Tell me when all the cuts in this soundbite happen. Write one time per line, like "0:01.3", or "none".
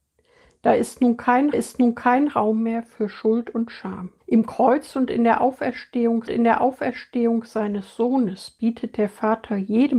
0:01.5
0:04.2
0:06.3